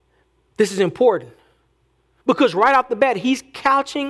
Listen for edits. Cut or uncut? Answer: uncut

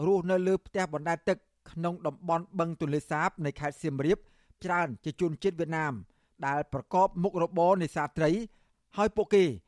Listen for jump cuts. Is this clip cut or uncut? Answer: cut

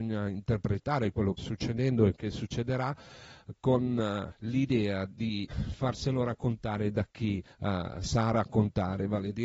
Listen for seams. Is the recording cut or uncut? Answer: cut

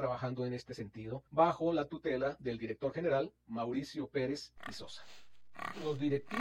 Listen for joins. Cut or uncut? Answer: cut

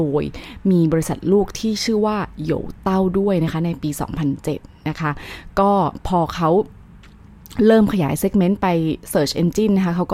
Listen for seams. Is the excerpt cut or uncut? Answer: uncut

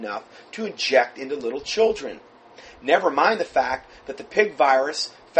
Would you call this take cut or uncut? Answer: uncut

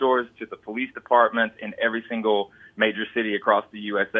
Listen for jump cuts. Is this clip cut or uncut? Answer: uncut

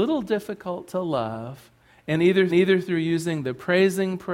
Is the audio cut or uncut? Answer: cut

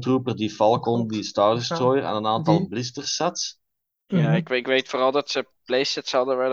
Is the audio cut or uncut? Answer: uncut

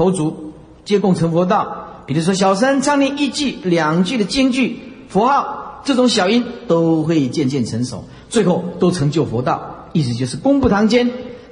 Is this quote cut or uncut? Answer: uncut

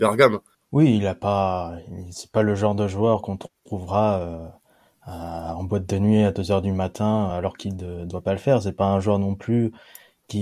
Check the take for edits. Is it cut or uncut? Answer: uncut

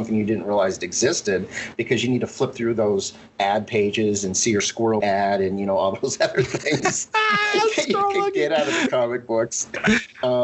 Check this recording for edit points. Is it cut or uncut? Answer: cut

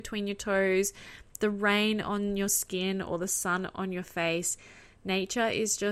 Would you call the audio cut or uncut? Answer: uncut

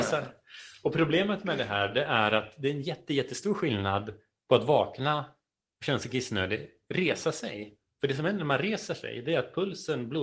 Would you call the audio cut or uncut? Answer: uncut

